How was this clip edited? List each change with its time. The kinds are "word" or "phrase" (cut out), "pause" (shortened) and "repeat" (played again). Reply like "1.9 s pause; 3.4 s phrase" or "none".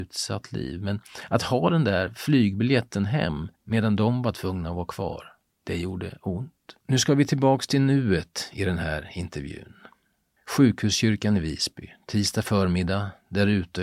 3.5 s pause; 5.4 s pause; 6.8 s pause